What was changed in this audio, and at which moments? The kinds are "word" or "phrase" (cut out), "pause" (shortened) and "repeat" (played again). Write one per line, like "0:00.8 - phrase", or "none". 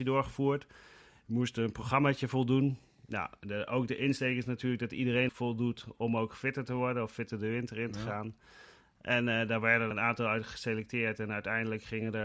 0:05.3 - word
0:09.9 - word